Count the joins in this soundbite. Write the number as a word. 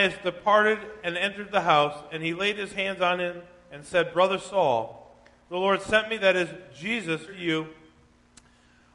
one